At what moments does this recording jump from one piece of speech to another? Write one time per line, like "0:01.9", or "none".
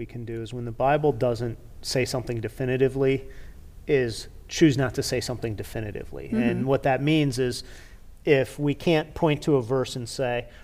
none